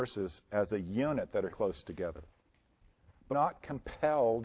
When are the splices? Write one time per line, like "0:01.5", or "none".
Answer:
0:01.5
0:03.3

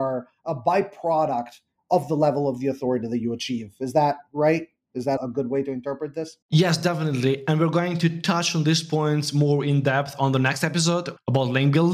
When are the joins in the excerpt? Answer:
0:06.4

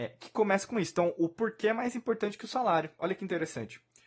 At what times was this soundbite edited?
none

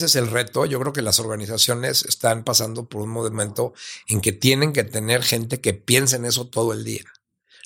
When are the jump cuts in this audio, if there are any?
none

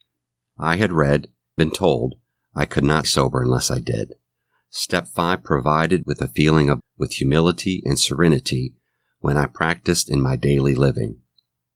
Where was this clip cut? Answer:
0:01.6
0:03.0
0:06.0
0:06.8

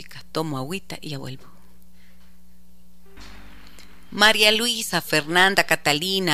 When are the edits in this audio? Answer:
none

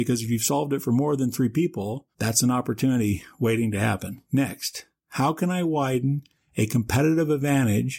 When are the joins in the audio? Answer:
0:02.1
0:04.2

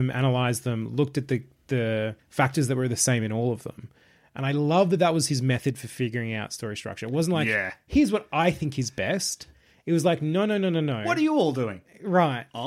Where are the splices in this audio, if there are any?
none

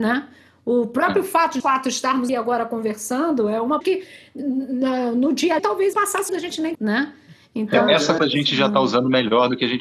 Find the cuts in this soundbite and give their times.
0:01.6
0:02.3
0:03.8
0:05.6
0:05.9
0:06.3
0:06.7
0:08.2

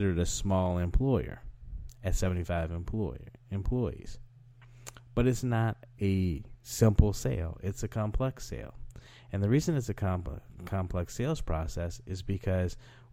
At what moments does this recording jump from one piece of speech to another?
none

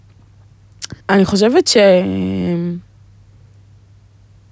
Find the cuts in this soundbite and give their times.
0:01.0

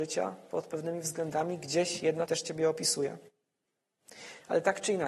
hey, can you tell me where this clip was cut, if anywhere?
0:02.3

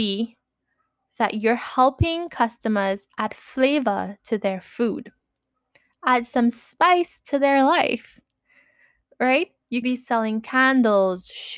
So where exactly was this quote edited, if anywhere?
0:09.8

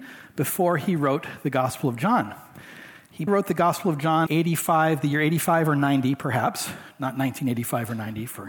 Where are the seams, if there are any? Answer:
0:03.3
0:04.3

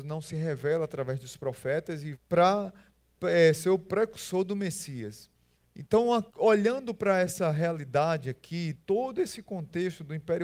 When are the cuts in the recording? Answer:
0:02.1
0:05.5
0:06.3
0:08.7

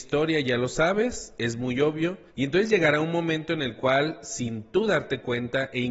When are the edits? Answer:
0:02.3

